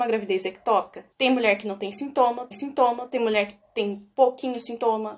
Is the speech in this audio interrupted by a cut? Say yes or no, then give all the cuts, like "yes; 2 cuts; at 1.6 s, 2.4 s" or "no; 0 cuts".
yes; 2 cuts; at 1.1 s, 2.5 s